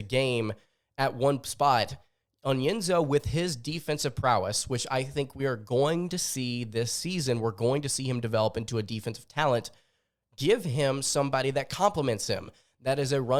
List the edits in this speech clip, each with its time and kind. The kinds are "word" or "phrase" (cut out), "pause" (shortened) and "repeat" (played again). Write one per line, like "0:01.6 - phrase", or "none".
none